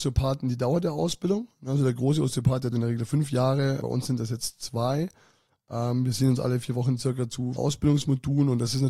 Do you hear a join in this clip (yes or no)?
yes